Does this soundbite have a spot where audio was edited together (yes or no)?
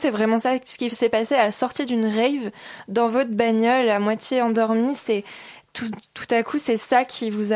no